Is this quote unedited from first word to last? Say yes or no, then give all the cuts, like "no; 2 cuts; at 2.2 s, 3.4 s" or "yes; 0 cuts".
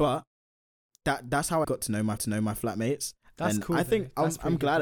no; 2 cuts; at 1.6 s, 2.2 s